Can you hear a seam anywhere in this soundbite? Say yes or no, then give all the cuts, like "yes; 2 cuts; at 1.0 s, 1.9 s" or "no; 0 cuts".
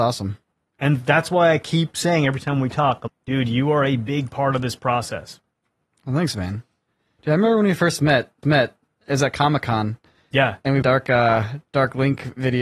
yes; 3 cuts; at 3.1 s, 8.4 s, 10.8 s